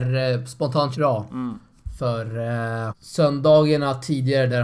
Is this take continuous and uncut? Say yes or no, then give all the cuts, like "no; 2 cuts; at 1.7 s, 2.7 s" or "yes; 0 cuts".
no; 2 cuts; at 0.9 s, 2.9 s